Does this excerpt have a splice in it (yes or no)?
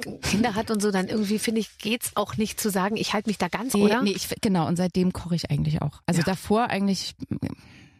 yes